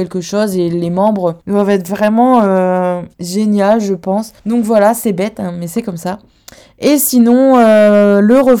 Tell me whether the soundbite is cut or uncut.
cut